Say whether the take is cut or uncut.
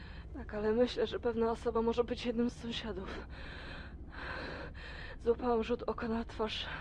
uncut